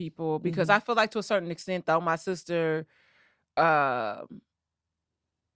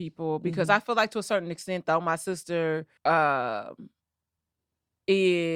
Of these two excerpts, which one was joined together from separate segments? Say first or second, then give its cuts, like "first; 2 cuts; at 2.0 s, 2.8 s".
second; 1 cut; at 3.0 s